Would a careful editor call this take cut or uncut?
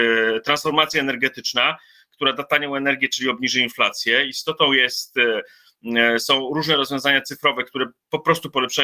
uncut